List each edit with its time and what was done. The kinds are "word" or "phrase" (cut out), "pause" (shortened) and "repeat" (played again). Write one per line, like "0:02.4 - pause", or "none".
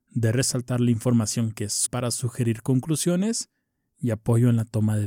0:01.9 - word